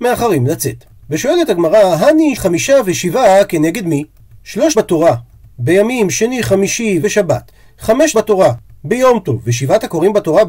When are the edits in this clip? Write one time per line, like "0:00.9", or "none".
0:02.4
0:04.7
0:07.0
0:08.1